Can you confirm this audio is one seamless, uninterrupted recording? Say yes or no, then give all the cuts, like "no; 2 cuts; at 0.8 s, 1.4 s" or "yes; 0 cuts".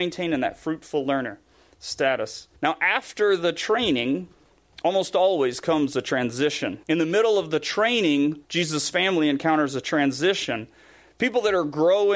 no; 3 cuts; at 2.6 s, 6.8 s, 8.4 s